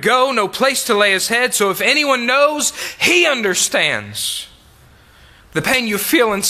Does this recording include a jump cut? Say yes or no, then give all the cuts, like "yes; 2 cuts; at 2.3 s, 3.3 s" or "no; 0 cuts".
no; 0 cuts